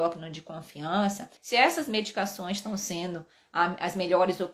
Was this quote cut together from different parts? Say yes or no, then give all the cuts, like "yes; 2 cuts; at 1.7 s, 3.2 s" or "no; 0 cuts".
yes; 1 cut; at 1.4 s